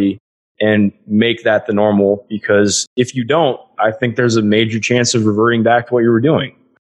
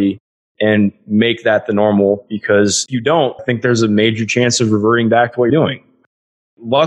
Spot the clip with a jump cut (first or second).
second